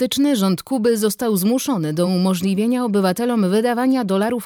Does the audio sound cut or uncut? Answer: uncut